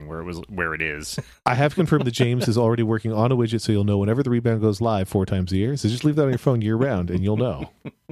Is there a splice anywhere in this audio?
no; 0 cuts

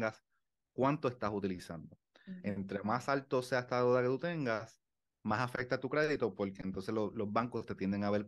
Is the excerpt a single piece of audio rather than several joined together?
yes; 0 cuts

